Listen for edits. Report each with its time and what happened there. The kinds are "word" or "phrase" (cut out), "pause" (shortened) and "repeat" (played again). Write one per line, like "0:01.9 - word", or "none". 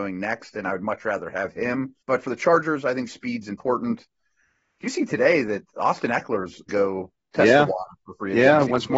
0:02.0 - pause
0:06.7 - phrase